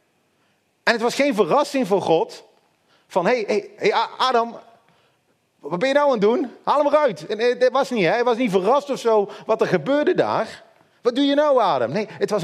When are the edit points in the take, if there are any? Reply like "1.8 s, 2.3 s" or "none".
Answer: none

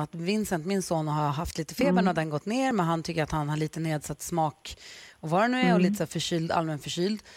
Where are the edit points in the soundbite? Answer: none

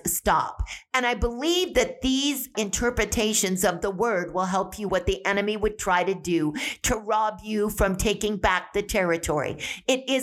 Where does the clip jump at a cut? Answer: 2.5 s, 4.9 s

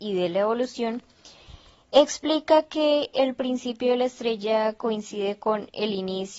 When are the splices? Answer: none

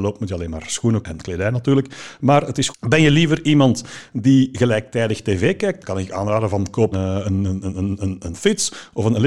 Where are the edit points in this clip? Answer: 1.0 s, 2.7 s, 5.8 s, 6.9 s

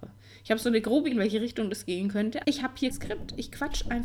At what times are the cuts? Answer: 1.1 s, 2.4 s, 2.9 s

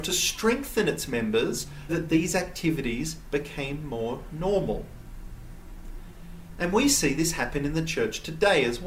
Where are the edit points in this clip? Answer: 1.9 s

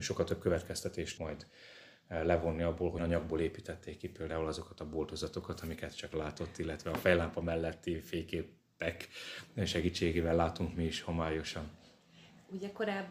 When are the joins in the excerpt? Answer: 1.2 s, 3.0 s, 6.1 s

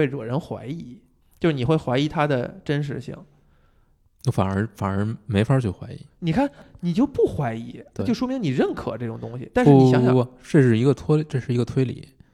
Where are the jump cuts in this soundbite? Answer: 1.2 s

